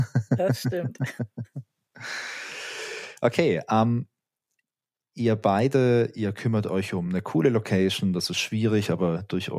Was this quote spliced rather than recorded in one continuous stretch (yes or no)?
no